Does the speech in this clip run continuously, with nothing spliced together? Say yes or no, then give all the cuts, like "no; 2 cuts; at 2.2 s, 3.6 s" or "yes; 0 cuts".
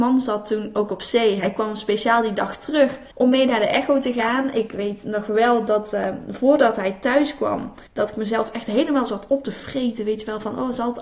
no; 2 cuts; at 3.1 s, 7.9 s